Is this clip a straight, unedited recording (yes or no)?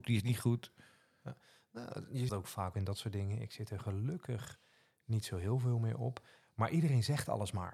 no